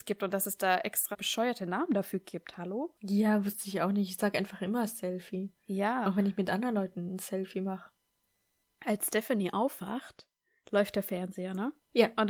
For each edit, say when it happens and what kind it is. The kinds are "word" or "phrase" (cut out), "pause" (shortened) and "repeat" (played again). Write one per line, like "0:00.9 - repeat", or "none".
0:01.1 - word